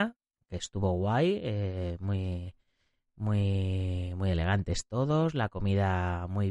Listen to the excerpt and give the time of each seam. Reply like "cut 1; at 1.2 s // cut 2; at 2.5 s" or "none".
none